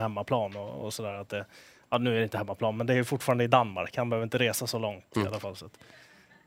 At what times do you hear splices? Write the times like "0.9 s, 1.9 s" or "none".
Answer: none